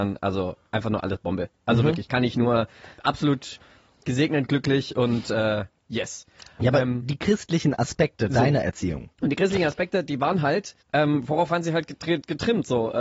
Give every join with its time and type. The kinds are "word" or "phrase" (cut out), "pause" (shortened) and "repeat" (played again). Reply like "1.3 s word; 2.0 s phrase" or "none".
3.0 s pause; 9.1 s pause; 10.8 s pause